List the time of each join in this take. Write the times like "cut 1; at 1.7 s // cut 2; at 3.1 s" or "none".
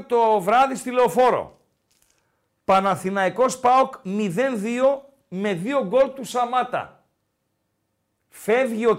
none